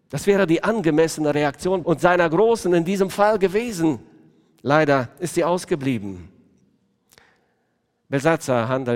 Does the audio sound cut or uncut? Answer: cut